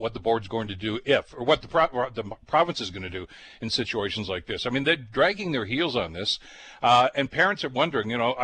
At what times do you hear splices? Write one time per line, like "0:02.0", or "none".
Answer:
none